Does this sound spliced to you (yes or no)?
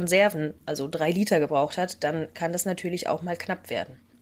no